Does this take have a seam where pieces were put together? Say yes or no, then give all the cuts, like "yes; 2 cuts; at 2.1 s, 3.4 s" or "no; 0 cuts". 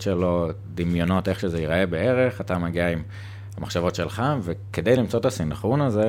no; 0 cuts